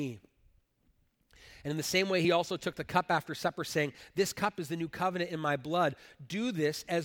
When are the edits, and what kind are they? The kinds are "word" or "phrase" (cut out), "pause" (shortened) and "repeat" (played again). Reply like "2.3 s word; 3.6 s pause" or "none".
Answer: none